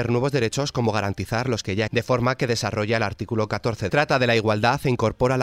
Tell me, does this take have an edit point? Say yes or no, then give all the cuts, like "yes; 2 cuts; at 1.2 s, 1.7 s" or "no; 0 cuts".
yes; 2 cuts; at 1.9 s, 3.9 s